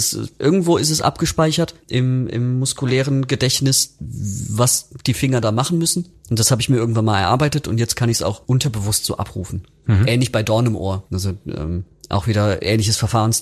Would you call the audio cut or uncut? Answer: uncut